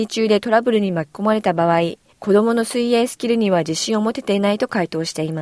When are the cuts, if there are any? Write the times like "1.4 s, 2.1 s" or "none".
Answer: 2.1 s